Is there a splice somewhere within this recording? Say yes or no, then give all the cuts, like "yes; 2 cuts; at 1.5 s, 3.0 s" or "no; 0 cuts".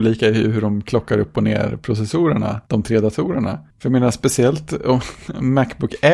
yes; 2 cuts; at 2.7 s, 3.7 s